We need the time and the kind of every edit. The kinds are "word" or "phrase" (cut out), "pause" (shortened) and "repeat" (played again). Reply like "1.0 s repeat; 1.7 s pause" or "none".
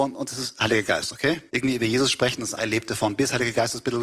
1.5 s pause; 2.6 s word